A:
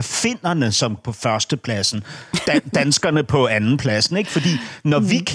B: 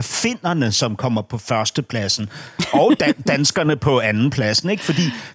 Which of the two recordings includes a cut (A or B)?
A